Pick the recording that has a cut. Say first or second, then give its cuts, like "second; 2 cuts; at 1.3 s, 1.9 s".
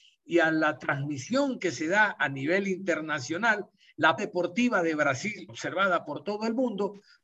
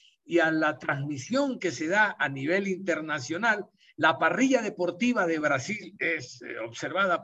first; 2 cuts; at 4.2 s, 5.5 s